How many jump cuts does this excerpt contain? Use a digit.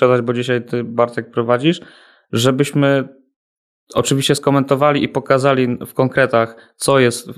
0